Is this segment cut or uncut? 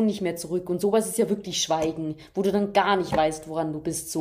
uncut